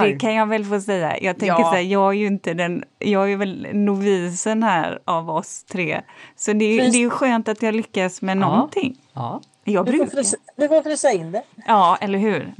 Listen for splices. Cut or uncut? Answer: uncut